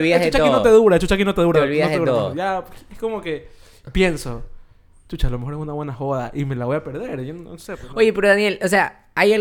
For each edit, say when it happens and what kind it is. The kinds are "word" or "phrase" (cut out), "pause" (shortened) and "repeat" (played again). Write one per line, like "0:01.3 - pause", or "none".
none